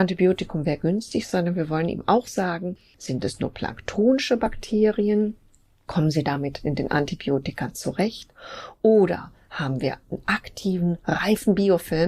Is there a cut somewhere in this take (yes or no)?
no